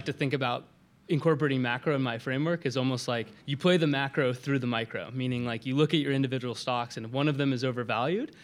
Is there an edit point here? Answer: yes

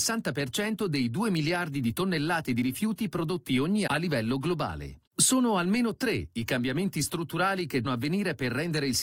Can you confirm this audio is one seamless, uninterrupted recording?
no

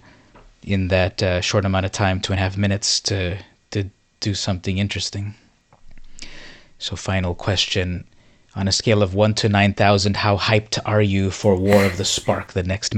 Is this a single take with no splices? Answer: yes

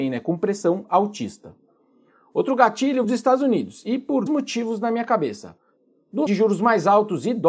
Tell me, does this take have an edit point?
yes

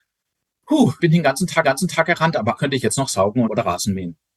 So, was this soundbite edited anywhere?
yes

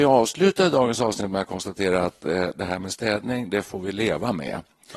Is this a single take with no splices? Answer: yes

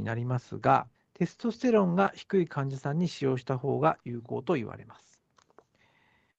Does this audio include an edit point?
yes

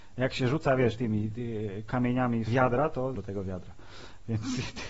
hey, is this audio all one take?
no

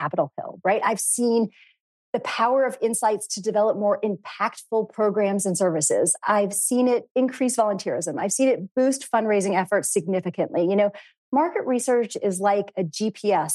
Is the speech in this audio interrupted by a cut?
no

